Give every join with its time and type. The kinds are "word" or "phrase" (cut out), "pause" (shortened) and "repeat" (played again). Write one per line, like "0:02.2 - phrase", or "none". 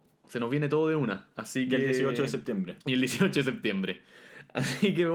0:02.8 - pause

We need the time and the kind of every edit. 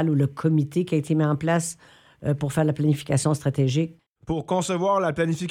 none

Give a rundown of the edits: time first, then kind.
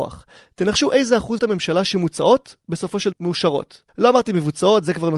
0:01.4 - word
0:03.1 - word
0:03.9 - pause

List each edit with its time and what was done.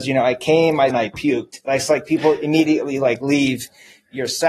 0:00.9 - phrase

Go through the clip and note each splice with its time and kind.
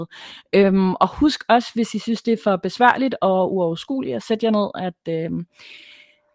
none

